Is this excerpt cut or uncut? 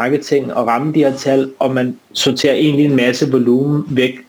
cut